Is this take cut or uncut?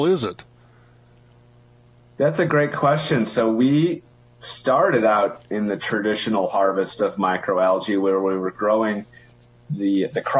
uncut